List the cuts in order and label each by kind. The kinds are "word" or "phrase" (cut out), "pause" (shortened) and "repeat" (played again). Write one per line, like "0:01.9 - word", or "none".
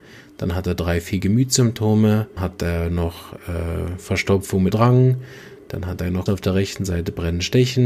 0:02.4 - word
0:04.7 - word
0:06.3 - word

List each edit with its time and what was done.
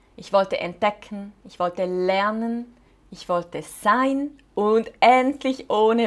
0:02.9 - pause

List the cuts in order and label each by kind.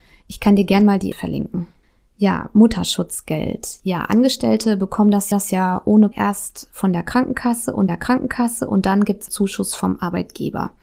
0:01.1 - word
0:01.8 - pause
0:05.3 - repeat
0:06.1 - word
0:07.9 - repeat
0:09.3 - word

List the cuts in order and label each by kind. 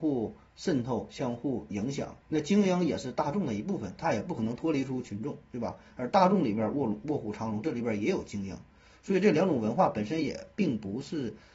0:02.2 - pause

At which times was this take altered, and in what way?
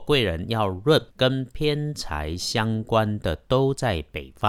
0:01.1 - pause

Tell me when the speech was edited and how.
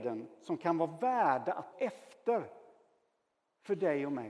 0:01.7 - word

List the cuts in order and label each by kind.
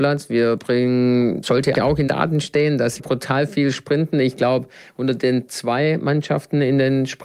0:01.4 - word
0:01.7 - word
0:02.1 - word
0:03.0 - word
0:05.5 - word

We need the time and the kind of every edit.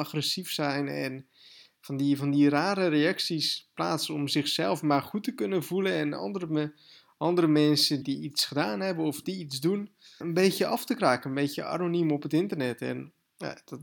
0:08.0 - word
0:10.2 - word

